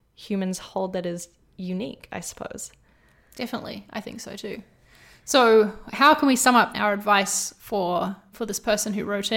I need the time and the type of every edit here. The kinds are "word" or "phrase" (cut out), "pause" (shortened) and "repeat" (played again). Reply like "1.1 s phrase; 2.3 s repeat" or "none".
6.7 s word

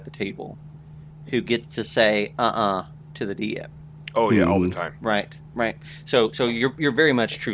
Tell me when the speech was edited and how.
none

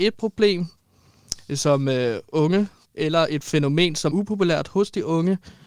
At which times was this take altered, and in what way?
2.8 s word; 4.1 s word

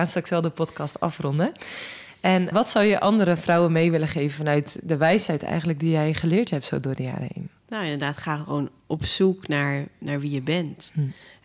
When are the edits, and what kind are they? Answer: 2.5 s word; 7.6 s pause

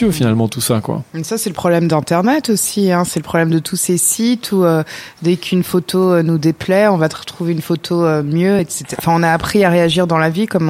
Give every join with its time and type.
none

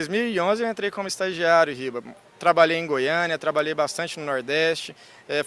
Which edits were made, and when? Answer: none

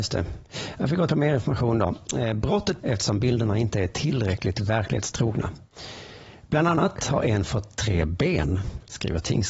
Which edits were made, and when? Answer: 1.1 s phrase; 2.8 s phrase; 7.5 s word

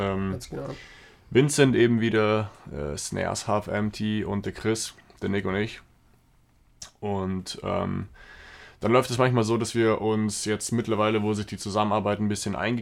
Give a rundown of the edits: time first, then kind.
none

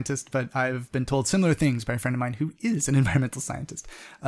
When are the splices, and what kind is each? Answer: none

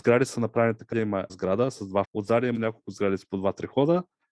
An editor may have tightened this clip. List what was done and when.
0.9 s word; 1.3 s word; 2.0 s word; 2.5 s word

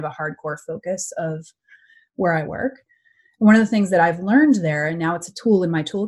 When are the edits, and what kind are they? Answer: none

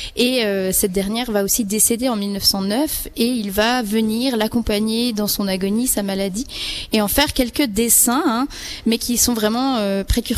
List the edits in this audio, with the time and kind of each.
none

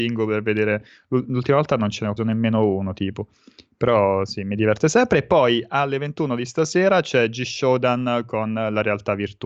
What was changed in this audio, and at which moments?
2.2 s word

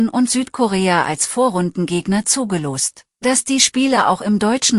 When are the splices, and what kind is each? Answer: 3.1 s pause

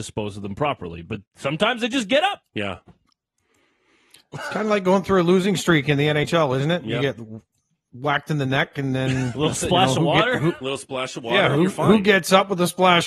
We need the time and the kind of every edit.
1.3 s pause; 2.5 s pause

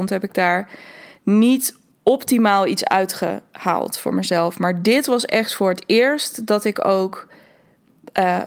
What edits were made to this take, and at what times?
1.9 s pause

